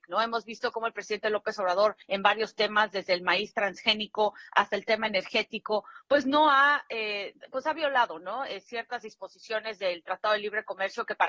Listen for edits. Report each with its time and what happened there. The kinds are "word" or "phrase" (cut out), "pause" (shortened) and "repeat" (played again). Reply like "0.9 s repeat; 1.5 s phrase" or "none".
2.0 s pause